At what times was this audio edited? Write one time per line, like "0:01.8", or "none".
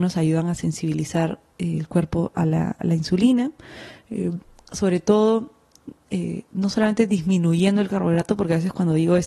none